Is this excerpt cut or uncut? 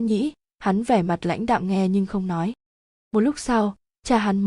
uncut